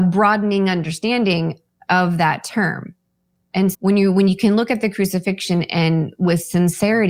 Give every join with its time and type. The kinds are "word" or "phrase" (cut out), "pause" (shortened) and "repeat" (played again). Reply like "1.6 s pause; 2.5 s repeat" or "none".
3.7 s word